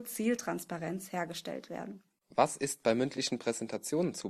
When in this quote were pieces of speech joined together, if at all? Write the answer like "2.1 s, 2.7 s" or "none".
none